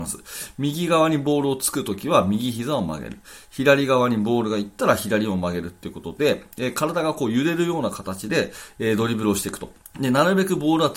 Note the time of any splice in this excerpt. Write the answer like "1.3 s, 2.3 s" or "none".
9.8 s